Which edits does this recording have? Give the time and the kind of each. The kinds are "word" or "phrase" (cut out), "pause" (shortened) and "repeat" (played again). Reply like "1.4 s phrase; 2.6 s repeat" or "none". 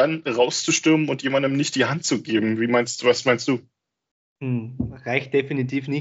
none